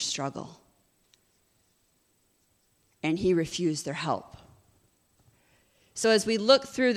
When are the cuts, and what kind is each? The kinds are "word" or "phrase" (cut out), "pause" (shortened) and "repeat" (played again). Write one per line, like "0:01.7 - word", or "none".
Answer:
none